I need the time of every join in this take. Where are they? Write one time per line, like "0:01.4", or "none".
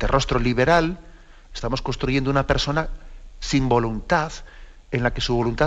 none